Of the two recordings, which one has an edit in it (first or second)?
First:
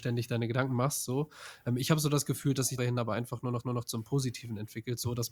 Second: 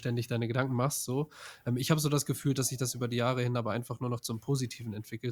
first